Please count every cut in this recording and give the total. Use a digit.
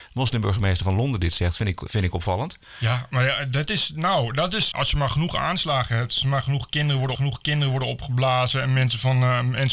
2